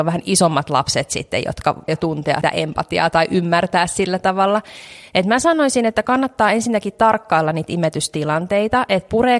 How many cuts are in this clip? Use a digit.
2